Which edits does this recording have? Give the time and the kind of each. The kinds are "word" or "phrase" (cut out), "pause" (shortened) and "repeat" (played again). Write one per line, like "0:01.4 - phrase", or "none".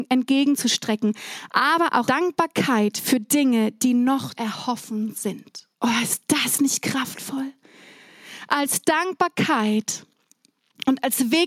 0:02.0 - word
0:04.3 - word
0:05.7 - pause